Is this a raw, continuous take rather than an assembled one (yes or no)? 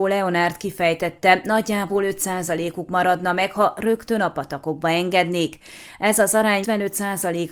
no